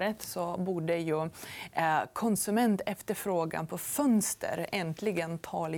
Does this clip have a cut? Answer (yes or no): no